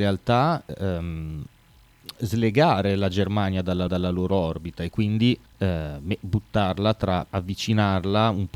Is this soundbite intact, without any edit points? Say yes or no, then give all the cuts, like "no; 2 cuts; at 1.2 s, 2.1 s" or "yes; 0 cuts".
no; 3 cuts; at 3.9 s, 5.5 s, 7.3 s